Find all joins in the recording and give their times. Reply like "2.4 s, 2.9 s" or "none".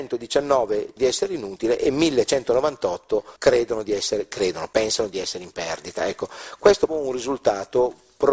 1.0 s, 3.4 s, 6.9 s